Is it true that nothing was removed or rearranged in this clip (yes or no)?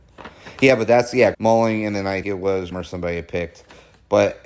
no